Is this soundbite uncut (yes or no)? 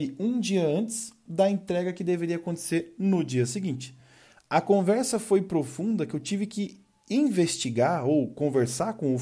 yes